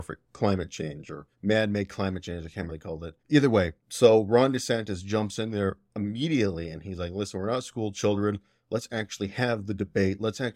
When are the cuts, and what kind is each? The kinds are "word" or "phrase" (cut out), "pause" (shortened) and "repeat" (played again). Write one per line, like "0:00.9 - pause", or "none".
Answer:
0:01.3 - pause
0:02.7 - phrase
0:03.2 - pause
0:03.8 - pause

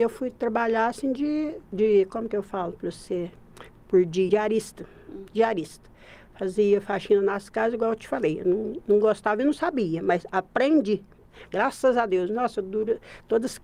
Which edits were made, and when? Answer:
0:01.6 - pause
0:04.3 - word

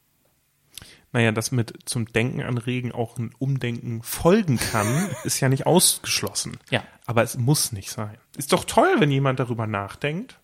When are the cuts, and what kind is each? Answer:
0:08.3 - pause

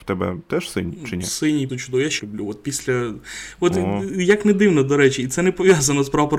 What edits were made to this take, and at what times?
0:01.7 - word
0:02.2 - phrase

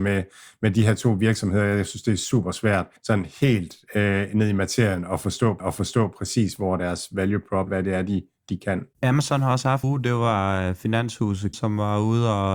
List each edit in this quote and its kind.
0:03.0 - pause
0:05.6 - repeat
0:07.7 - word
0:08.9 - pause
0:09.8 - phrase
0:11.5 - word

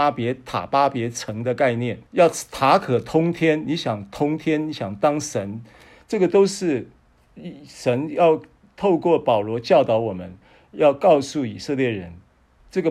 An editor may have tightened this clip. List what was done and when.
0:02.1 - pause

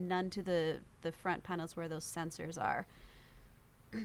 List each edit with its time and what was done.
none

